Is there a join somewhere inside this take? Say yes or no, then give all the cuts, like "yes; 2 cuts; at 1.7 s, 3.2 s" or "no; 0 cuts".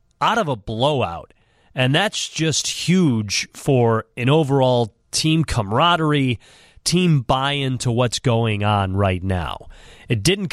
no; 0 cuts